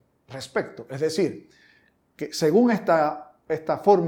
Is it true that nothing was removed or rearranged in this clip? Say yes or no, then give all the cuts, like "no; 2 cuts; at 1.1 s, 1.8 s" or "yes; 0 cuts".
yes; 0 cuts